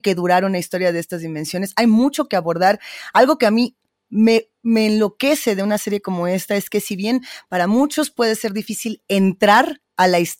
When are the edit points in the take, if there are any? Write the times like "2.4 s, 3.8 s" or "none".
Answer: none